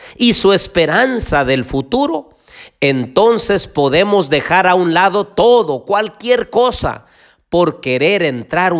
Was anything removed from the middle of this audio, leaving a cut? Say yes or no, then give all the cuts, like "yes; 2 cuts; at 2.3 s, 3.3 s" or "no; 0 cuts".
no; 0 cuts